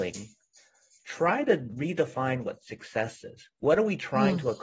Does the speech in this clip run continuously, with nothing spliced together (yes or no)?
no